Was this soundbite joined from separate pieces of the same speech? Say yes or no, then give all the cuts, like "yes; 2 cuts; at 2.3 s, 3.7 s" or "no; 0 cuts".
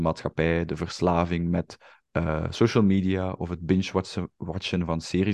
no; 0 cuts